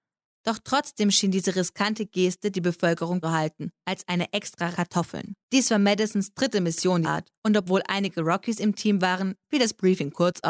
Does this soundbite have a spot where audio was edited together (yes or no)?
yes